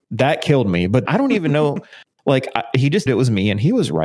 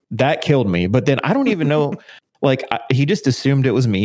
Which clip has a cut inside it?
first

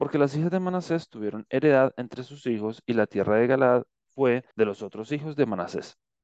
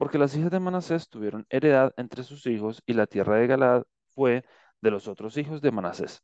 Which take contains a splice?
first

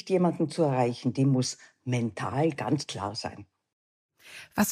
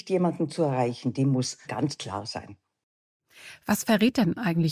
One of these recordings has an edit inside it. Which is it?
second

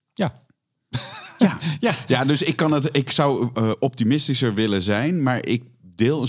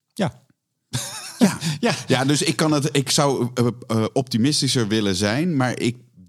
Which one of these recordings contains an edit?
first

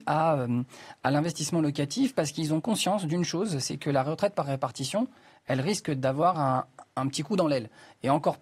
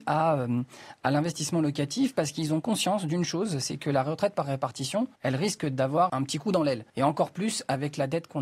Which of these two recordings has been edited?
second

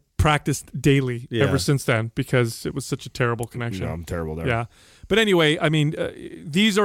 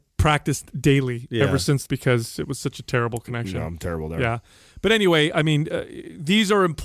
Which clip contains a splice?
second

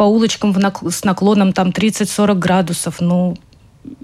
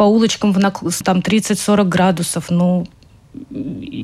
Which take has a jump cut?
second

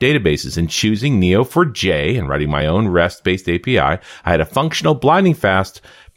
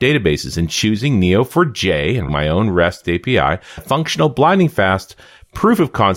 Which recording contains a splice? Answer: second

